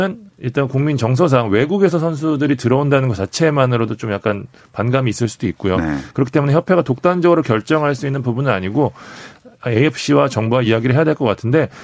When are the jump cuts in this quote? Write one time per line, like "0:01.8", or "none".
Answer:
none